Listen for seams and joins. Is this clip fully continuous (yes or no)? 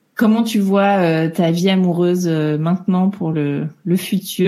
yes